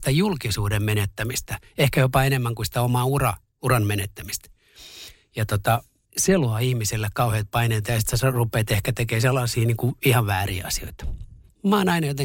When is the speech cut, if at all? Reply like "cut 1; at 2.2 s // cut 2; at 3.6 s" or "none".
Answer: none